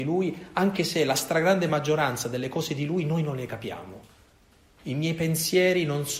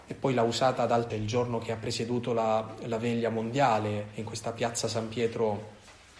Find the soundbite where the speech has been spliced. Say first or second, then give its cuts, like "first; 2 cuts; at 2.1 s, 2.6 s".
second; 1 cut; at 1.1 s